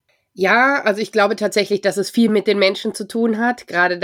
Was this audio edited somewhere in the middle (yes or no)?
no